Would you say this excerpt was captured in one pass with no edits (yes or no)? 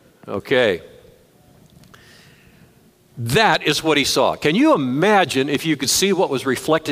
yes